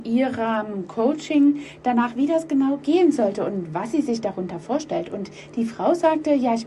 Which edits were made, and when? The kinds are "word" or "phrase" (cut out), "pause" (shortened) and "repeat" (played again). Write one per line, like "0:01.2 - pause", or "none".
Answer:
none